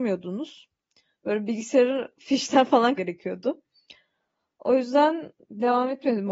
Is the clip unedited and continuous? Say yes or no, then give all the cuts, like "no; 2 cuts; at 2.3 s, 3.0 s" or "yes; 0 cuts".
no; 1 cut; at 3.0 s